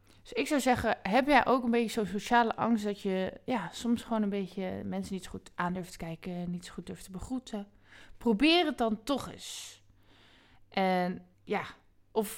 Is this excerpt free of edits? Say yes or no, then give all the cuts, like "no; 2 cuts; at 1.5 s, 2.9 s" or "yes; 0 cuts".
no; 1 cut; at 11.3 s